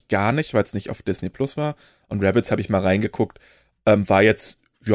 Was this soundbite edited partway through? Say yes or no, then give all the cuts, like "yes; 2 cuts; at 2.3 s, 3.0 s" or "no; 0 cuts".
no; 0 cuts